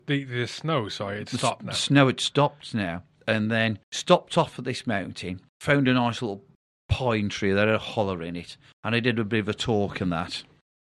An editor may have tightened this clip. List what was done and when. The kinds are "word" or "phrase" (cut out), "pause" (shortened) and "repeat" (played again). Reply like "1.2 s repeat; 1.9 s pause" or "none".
3.2 s word; 3.8 s pause; 5.5 s pause